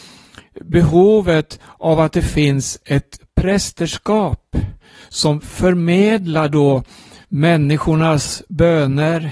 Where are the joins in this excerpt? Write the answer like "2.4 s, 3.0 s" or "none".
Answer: none